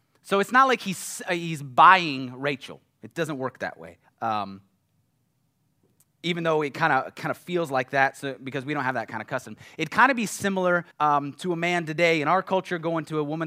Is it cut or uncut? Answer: cut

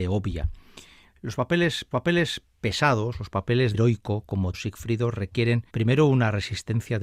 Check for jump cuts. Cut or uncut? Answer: cut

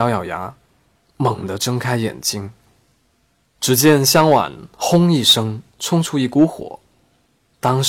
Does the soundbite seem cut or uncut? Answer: cut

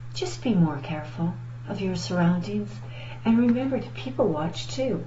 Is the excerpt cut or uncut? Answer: uncut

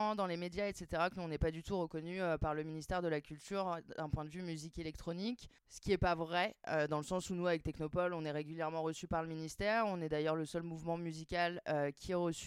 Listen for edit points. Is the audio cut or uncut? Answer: cut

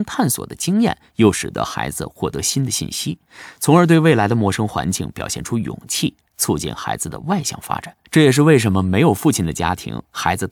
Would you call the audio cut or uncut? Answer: cut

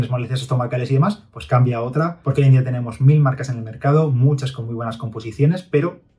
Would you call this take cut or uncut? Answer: uncut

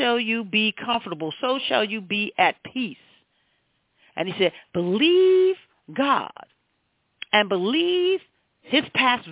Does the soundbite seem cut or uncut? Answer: uncut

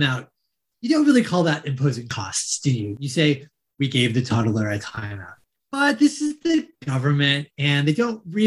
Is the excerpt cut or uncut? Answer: uncut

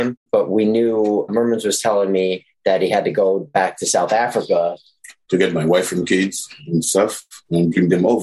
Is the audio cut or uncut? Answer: uncut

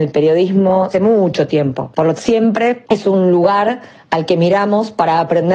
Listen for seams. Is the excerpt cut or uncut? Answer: cut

